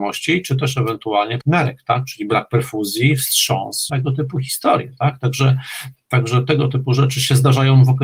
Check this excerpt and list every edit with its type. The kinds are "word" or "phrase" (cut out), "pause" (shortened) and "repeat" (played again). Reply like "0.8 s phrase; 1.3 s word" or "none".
1.4 s phrase; 3.9 s word